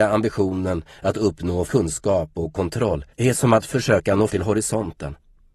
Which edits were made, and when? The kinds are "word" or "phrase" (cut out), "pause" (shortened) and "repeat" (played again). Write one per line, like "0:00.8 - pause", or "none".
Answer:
0:01.7 - word
0:03.1 - pause
0:04.3 - word